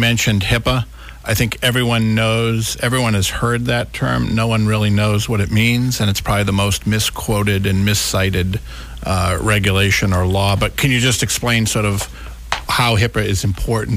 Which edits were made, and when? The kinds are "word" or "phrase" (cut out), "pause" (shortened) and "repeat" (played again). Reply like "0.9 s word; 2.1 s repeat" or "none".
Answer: none